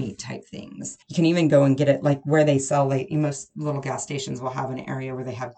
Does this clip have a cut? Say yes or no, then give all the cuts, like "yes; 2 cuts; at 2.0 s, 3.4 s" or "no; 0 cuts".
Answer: yes; 1 cut; at 1.0 s